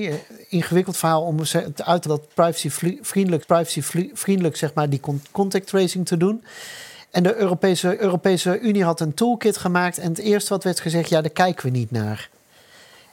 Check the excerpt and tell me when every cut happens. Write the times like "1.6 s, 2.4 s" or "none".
2.0 s, 3.4 s, 8.0 s

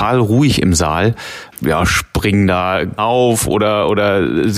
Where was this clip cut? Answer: 1.6 s, 3.0 s

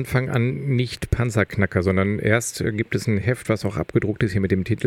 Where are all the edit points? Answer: none

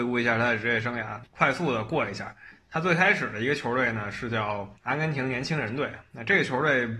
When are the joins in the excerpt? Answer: 1.3 s, 4.8 s

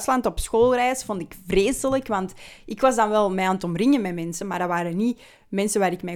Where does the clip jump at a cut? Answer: none

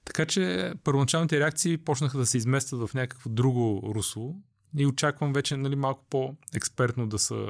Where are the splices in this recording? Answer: none

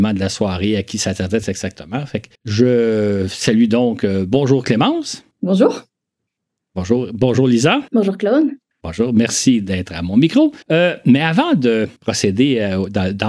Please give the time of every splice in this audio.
2.3 s, 5.3 s, 7.9 s, 8.7 s, 10.6 s, 12.0 s

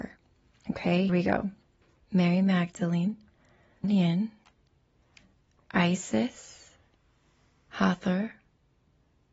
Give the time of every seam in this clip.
1.1 s, 1.8 s, 3.8 s

